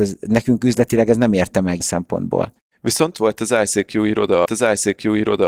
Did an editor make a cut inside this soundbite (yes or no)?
yes